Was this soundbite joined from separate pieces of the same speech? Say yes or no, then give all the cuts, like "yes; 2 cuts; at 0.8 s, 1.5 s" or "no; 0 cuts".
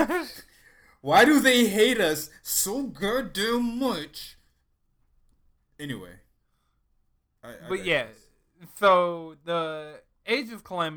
no; 0 cuts